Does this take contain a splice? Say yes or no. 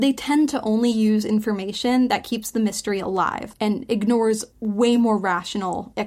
no